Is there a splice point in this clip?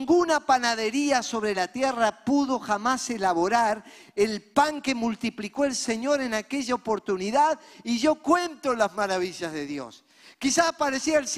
no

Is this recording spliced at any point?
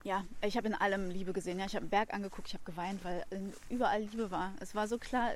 no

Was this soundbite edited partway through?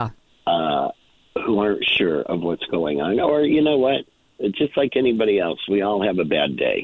no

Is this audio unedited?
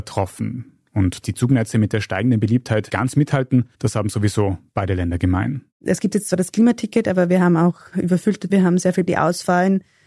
no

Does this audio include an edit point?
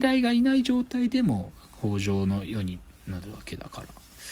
no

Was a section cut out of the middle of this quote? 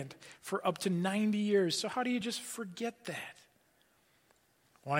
no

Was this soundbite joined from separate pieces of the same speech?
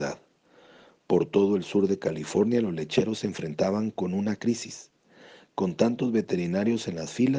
no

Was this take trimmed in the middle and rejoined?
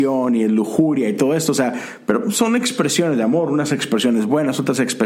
no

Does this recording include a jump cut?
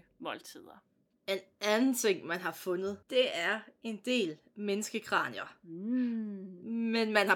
yes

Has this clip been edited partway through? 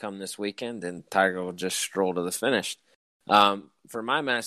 no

